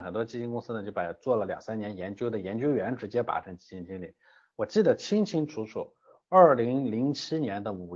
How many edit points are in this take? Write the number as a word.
zero